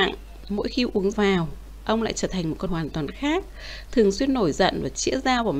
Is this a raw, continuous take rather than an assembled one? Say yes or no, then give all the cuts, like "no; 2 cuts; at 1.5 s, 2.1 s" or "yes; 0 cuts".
no; 2 cuts; at 1.1 s, 2.7 s